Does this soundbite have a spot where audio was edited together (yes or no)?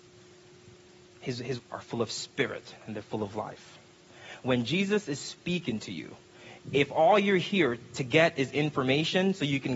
yes